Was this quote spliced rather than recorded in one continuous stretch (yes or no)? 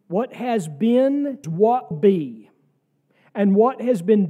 yes